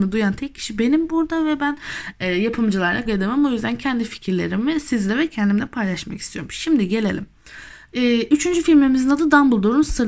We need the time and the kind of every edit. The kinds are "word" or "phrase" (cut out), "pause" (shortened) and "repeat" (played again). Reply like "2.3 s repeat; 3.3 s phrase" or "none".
3.1 s word